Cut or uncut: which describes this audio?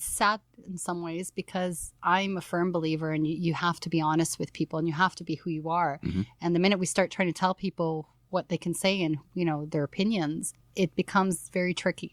cut